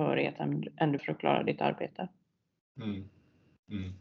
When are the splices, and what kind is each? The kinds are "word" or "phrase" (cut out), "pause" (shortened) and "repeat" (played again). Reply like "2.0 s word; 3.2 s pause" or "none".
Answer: 1.0 s word